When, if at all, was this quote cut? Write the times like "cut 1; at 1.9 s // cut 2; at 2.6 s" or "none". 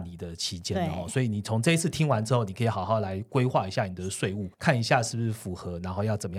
cut 1; at 4.5 s